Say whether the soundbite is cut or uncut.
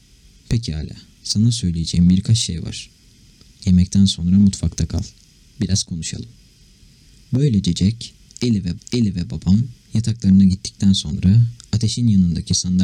cut